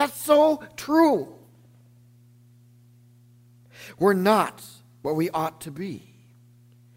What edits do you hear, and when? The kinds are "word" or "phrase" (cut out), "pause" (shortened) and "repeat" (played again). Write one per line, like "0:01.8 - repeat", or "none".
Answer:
none